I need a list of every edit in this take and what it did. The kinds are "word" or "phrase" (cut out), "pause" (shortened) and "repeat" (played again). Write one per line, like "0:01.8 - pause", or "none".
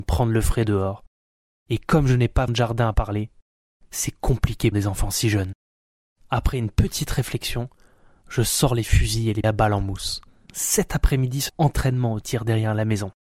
0:02.5 - word
0:02.9 - word
0:04.7 - word
0:09.4 - word
0:11.5 - word

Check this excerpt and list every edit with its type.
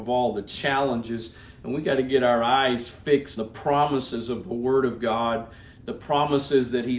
0:03.4 - word

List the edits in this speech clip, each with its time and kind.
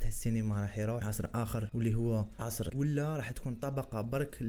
0:01.0 - word
0:02.7 - word

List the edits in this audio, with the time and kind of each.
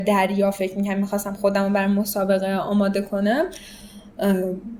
none

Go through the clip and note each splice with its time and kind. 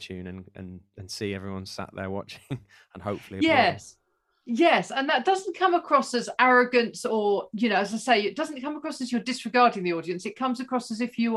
none

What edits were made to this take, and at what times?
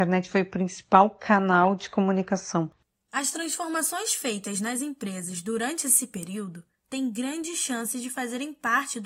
none

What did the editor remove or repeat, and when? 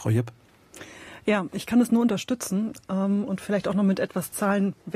none

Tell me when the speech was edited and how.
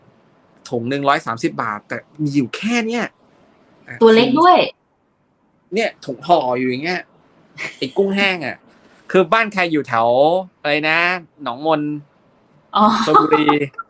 none

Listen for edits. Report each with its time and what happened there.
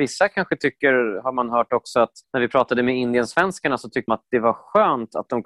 0:02.2 - pause
0:04.1 - word

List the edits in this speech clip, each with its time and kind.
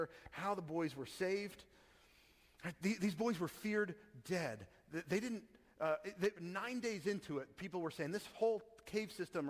none

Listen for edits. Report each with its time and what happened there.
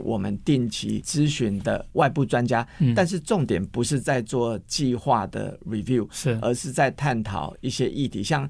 none

